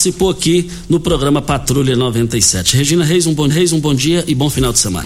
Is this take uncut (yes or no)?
no